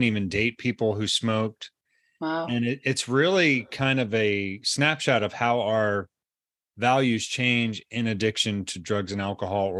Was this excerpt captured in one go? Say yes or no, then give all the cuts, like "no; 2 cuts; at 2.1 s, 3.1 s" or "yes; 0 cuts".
yes; 0 cuts